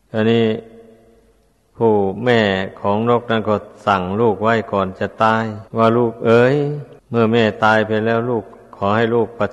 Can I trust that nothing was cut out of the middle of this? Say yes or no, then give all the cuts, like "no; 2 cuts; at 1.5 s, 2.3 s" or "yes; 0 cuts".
no; 2 cuts; at 5.7 s, 7.0 s